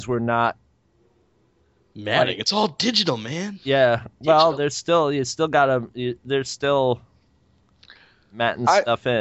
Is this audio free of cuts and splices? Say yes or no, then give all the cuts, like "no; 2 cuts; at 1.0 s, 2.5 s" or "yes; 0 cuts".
yes; 0 cuts